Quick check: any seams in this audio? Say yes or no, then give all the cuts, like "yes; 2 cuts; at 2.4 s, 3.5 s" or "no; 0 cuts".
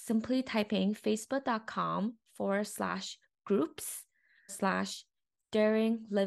yes; 1 cut; at 4.5 s